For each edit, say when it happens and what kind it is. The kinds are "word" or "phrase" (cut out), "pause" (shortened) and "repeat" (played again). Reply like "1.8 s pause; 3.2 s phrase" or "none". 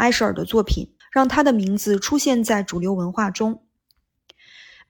1.0 s pause

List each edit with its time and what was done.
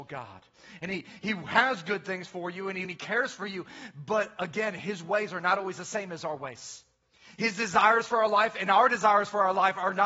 2.8 s phrase

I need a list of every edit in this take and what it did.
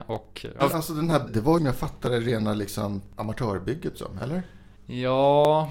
1.3 s phrase; 1.6 s phrase; 3.9 s phrase; 4.8 s pause

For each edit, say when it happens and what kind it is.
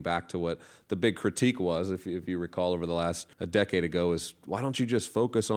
3.3 s pause

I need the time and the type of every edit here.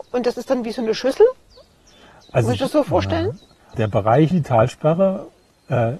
3.7 s word; 4.3 s word

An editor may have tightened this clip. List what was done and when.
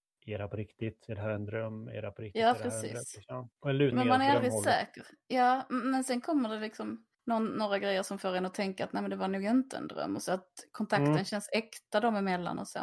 3.5 s pause; 3.9 s word; 7.1 s pause

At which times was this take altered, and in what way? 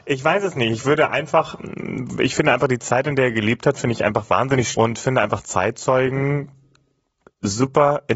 4.7 s word

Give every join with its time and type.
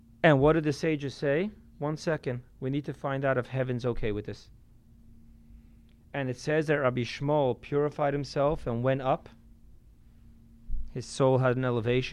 none

